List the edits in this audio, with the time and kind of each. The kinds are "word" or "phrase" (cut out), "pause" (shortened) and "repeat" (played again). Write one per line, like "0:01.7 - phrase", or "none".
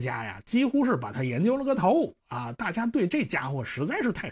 0:02.2 - pause